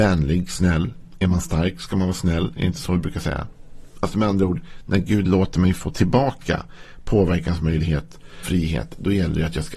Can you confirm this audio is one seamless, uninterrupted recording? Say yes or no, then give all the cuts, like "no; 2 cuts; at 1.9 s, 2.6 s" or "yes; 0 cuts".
no; 1 cut; at 8.4 s